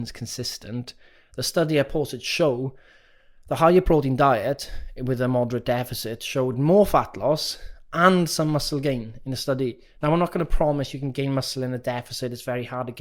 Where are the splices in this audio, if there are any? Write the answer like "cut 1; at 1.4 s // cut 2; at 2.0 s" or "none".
none

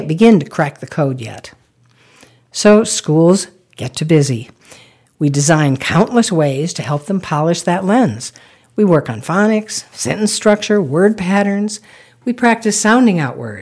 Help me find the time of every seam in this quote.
none

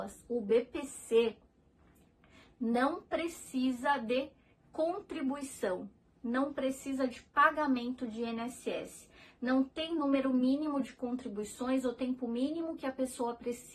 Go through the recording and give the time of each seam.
none

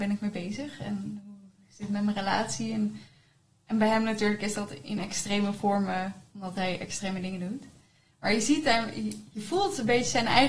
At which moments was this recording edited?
none

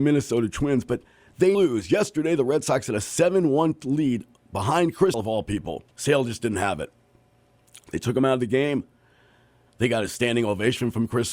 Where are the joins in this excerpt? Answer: cut 1; at 1.5 s // cut 2; at 5.1 s // cut 3; at 5.9 s

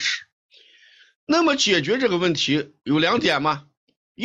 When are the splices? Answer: none

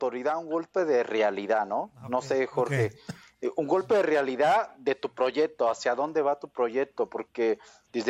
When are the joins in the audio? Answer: none

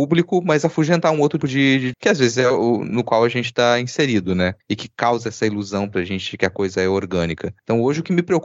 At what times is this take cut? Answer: cut 1; at 1.4 s // cut 2; at 1.9 s

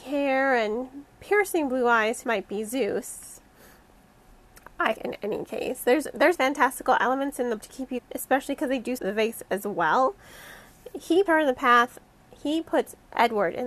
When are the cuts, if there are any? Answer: cut 1; at 2.2 s // cut 2; at 4.9 s // cut 3; at 6.3 s // cut 4; at 7.6 s // cut 5; at 8.0 s // cut 6; at 9.0 s // cut 7; at 11.3 s

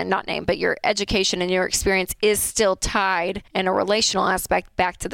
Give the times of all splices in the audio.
cut 1; at 3.5 s

